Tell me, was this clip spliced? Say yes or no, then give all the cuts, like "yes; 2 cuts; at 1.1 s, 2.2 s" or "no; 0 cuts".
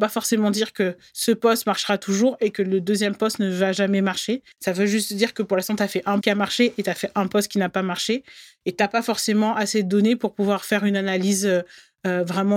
yes; 2 cuts; at 4.5 s, 6.2 s